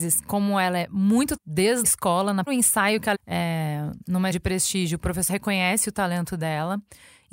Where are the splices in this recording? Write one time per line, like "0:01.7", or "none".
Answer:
0:01.4
0:01.8
0:02.5
0:03.1
0:04.3
0:05.3